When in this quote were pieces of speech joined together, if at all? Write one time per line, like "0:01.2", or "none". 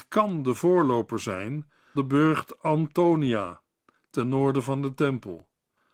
0:01.9

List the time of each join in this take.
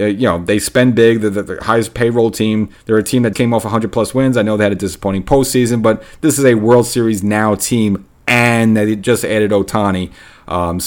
0:03.3

